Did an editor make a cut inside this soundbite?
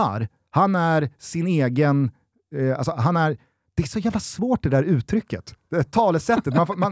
no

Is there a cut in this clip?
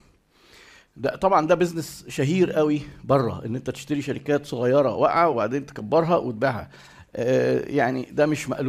no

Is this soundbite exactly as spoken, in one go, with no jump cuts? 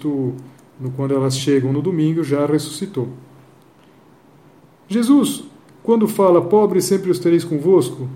yes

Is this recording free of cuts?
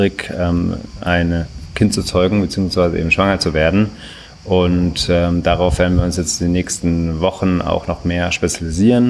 yes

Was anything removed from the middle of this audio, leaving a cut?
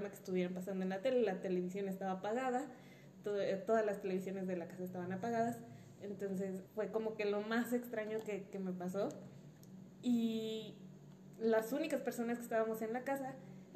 yes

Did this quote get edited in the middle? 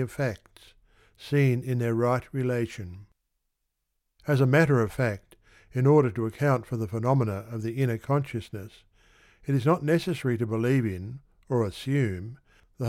no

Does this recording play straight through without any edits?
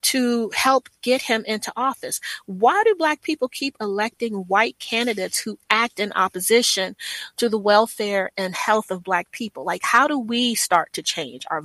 yes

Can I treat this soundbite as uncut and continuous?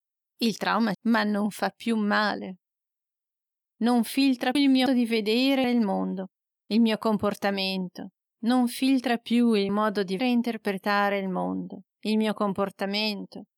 no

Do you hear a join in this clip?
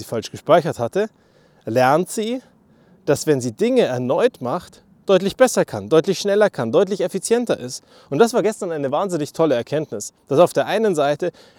no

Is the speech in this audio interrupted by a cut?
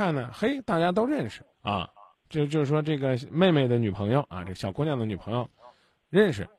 yes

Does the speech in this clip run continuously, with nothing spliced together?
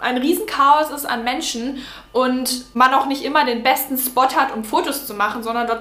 yes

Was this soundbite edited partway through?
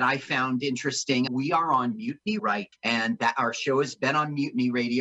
yes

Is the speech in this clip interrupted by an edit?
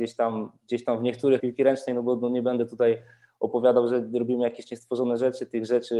yes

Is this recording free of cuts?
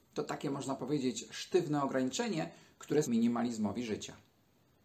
no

